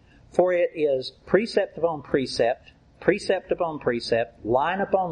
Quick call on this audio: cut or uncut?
uncut